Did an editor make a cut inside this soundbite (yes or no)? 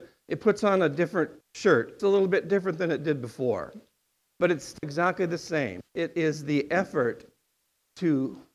yes